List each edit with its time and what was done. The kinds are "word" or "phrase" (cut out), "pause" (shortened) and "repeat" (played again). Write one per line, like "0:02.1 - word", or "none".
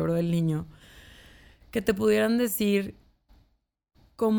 none